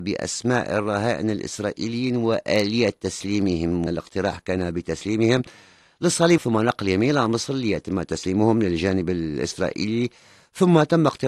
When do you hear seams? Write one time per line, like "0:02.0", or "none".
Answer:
0:03.9
0:06.4